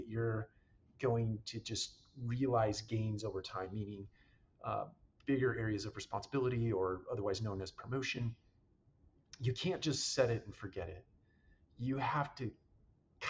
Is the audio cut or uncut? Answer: uncut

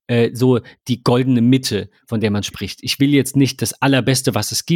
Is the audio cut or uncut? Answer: uncut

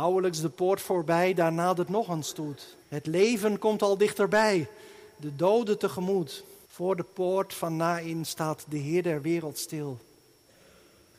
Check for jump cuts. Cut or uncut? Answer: cut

